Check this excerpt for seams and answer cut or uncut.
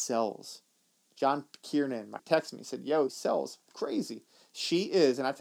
cut